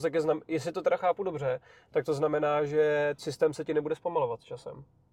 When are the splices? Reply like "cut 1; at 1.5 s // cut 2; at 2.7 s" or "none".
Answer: cut 1; at 3.2 s

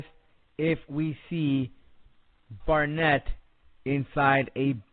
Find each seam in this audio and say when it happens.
cut 1; at 2.6 s

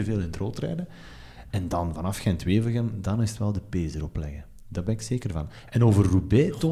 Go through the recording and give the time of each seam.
none

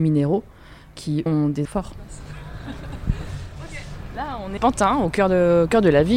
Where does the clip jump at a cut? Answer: cut 1; at 1.3 s // cut 2; at 1.6 s // cut 3; at 4.6 s

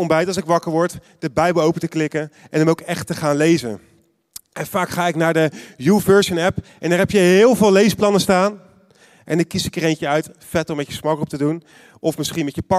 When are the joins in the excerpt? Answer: none

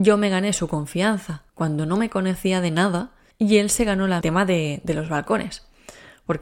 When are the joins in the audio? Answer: cut 1; at 1.5 s // cut 2; at 3.3 s // cut 3; at 4.2 s

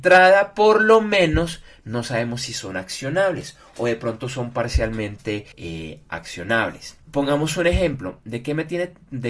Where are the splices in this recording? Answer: cut 1; at 5.5 s // cut 2; at 7.0 s

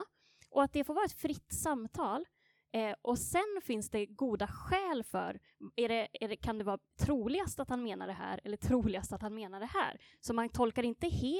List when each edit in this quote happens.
none

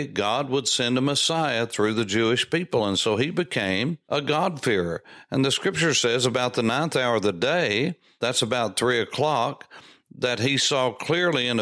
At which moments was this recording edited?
none

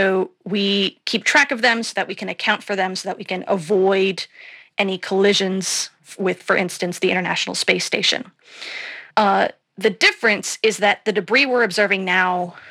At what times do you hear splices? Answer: cut 1; at 9.1 s

